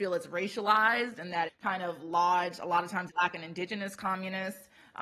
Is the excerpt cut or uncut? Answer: cut